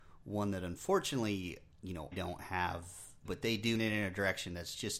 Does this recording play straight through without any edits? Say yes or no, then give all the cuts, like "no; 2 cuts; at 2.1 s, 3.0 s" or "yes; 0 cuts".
no; 4 cuts; at 1.7 s, 2.1 s, 3.3 s, 3.8 s